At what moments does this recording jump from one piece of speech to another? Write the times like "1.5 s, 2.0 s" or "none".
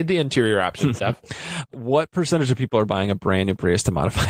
1.0 s, 1.7 s